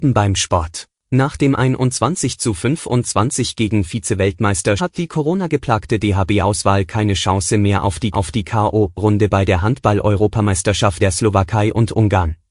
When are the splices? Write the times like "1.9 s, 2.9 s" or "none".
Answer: 1.0 s, 4.8 s, 8.1 s, 11.0 s